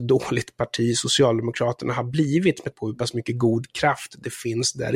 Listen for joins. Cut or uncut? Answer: cut